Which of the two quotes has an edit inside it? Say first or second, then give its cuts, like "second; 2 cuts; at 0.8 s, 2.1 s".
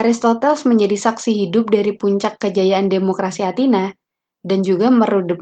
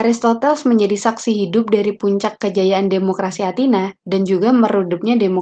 second; 1 cut; at 4.0 s